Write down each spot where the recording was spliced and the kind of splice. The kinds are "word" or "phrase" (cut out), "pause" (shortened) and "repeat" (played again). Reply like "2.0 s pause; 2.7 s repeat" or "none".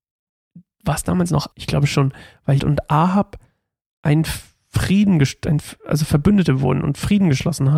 1.5 s word; 2.6 s word